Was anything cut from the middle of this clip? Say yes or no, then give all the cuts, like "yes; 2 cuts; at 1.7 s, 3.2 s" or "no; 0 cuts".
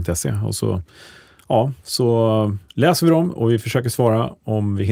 no; 0 cuts